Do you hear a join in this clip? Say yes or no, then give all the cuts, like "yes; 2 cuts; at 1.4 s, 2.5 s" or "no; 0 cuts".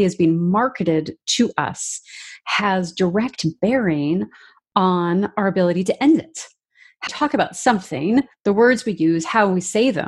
yes; 1 cut; at 7.1 s